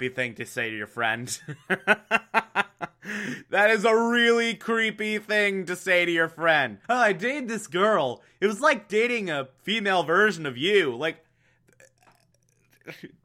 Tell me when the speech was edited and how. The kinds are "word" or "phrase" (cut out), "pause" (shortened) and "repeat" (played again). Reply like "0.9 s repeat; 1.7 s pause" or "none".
6.8 s pause